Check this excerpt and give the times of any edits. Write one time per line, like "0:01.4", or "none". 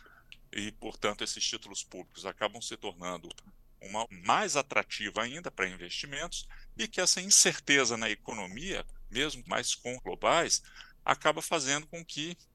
0:04.0
0:06.9
0:09.5
0:10.0